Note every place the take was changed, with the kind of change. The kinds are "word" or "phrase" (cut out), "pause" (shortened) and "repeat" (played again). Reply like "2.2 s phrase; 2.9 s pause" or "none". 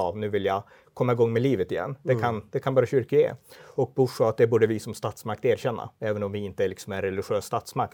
none